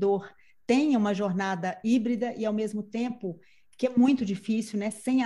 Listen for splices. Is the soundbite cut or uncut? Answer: uncut